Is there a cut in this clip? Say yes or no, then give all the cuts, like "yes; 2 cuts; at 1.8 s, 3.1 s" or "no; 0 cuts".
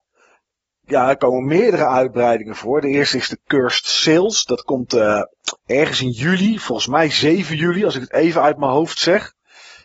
yes; 1 cut; at 5.6 s